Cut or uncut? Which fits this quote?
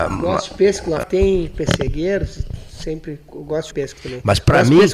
cut